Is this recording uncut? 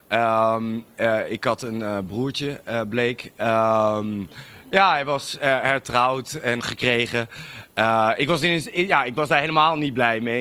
no; 1 cut; at 6.6 s

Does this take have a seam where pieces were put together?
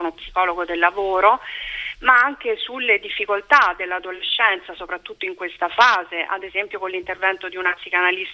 no; 0 cuts

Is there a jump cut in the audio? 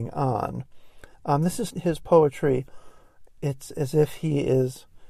yes; 3 cuts; at 1.1 s, 1.7 s, 3.3 s

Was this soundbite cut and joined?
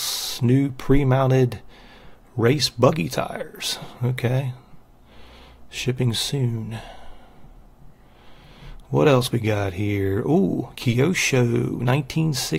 no; 0 cuts

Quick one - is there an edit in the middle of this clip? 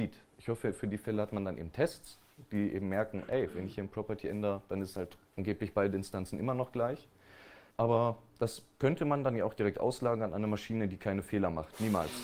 yes; 2 cuts; at 5.3 s, 7.7 s

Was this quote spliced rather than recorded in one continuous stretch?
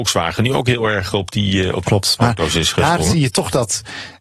yes; 1 cut; at 1.8 s

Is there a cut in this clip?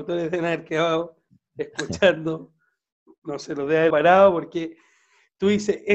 yes; 1 cut; at 3.9 s

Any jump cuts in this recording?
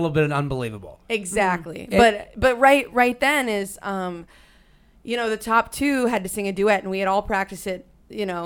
no; 0 cuts

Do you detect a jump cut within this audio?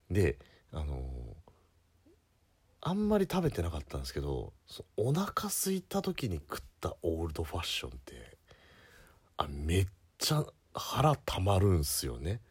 no; 0 cuts

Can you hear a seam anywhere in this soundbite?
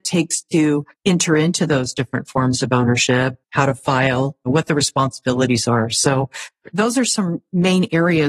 yes; 2 cuts; at 0.9 s, 3.4 s

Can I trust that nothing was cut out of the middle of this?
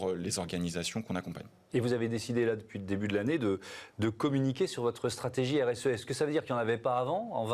yes; 0 cuts

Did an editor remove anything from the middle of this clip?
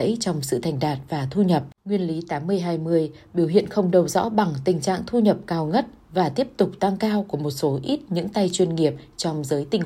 yes; 1 cut; at 1.8 s

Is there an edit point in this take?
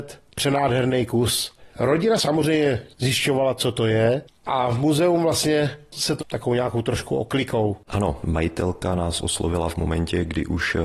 yes; 2 cuts; at 1.7 s, 6.2 s

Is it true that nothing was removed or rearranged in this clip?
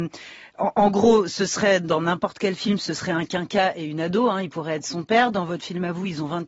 yes; 0 cuts

